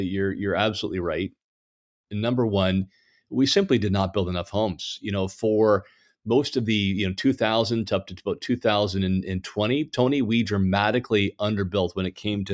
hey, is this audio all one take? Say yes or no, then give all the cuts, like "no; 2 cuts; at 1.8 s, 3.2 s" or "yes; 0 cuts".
yes; 0 cuts